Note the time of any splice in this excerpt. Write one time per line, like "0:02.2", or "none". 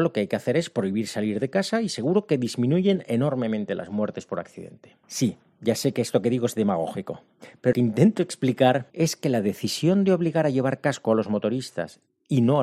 0:05.0
0:07.7
0:08.9